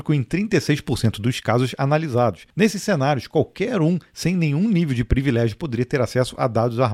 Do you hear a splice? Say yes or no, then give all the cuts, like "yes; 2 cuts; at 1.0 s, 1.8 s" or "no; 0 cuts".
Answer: no; 0 cuts